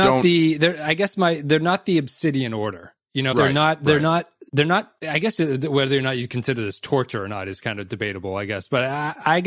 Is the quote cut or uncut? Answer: cut